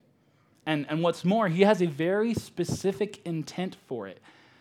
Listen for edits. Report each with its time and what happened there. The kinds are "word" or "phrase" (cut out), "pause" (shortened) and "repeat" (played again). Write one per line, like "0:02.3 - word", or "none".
none